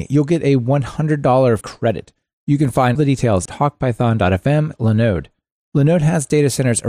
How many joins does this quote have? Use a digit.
4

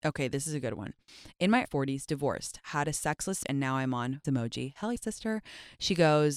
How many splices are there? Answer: 4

